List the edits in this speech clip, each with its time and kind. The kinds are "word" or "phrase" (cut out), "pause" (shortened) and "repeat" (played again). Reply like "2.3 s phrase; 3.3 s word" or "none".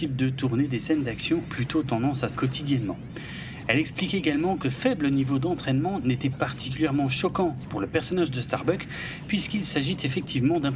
1.4 s word; 2.3 s word; 4.6 s word; 6.3 s word